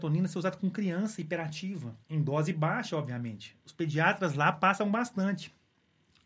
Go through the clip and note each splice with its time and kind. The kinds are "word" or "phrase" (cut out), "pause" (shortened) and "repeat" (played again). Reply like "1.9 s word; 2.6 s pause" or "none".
2.0 s pause

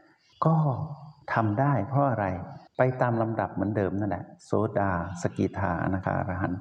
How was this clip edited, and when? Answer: 2.7 s pause

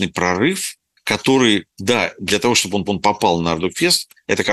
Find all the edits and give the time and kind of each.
1.7 s pause; 2.9 s repeat

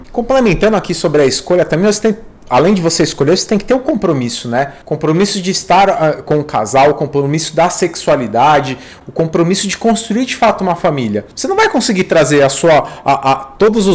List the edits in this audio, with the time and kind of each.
4.8 s pause; 11.3 s pause

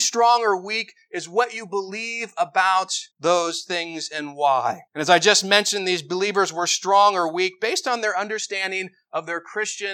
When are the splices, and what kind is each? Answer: 3.1 s pause; 4.9 s pause

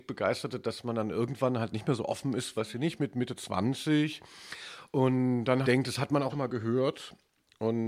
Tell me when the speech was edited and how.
2.5 s word; 5.6 s word; 6.3 s word

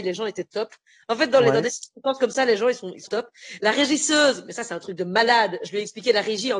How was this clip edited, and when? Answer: 3.1 s word

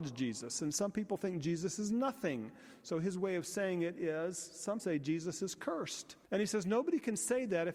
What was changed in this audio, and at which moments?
4.8 s word; 6.2 s pause

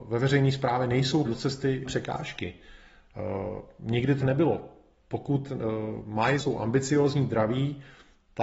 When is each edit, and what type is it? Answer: 1.2 s word; 1.8 s word; 4.2 s word; 6.4 s word

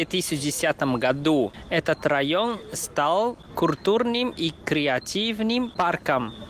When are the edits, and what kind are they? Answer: none

